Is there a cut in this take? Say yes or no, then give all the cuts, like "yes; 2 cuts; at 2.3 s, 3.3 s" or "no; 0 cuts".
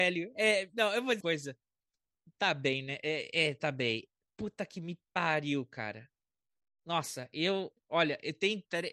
yes; 2 cuts; at 1.2 s, 7.8 s